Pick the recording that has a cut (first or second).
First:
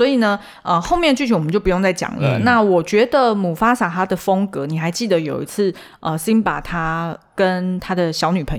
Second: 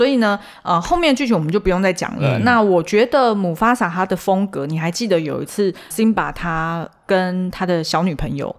second